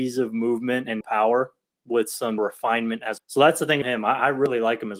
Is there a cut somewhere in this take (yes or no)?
yes